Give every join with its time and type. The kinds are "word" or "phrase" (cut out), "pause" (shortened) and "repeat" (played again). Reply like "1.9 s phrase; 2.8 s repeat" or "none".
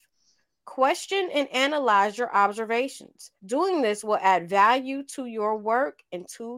3.4 s pause